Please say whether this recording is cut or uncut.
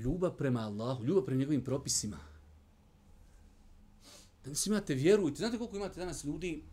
uncut